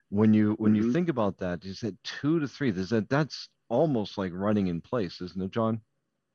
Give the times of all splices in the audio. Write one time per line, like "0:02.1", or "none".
none